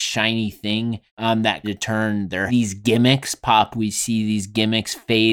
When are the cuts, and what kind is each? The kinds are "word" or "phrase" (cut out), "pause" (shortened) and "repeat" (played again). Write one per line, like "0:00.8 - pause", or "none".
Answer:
0:01.1 - pause
0:01.6 - phrase
0:02.5 - phrase
0:03.7 - word